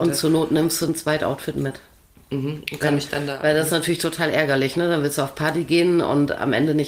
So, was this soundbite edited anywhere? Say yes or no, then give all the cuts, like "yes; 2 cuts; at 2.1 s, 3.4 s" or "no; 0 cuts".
no; 0 cuts